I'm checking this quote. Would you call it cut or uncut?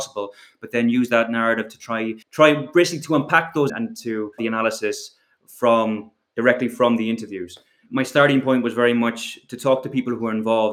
cut